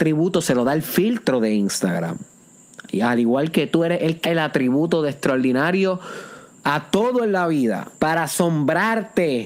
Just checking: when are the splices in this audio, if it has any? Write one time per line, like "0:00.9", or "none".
0:04.2
0:07.9